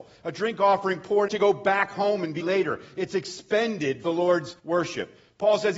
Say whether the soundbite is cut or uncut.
cut